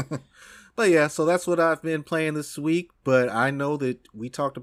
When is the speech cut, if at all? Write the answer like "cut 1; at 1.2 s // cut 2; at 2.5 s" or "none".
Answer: none